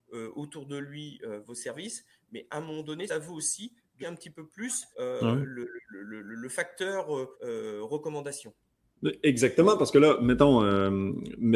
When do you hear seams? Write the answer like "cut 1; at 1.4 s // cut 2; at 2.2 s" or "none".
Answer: cut 1; at 3.1 s // cut 2; at 4.0 s // cut 3; at 4.9 s // cut 4; at 7.3 s

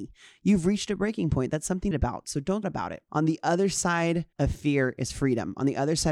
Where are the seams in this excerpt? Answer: cut 1; at 1.9 s // cut 2; at 2.6 s // cut 3; at 4.3 s

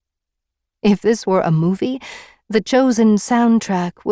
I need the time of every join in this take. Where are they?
none

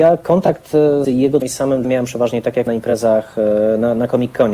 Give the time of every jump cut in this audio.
cut 1; at 1.0 s // cut 2; at 1.4 s // cut 3; at 1.8 s // cut 4; at 2.7 s

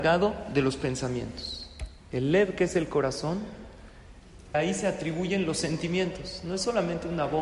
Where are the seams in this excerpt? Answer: cut 1; at 2.0 s // cut 2; at 4.5 s

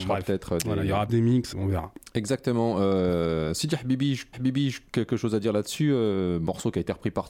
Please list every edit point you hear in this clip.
cut 1; at 1.1 s // cut 2; at 1.5 s // cut 3; at 4.3 s

